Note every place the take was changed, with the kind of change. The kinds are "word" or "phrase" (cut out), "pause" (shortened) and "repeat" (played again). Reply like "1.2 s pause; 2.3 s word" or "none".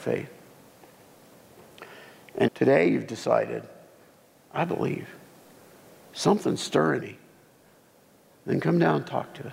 2.5 s word; 7.0 s word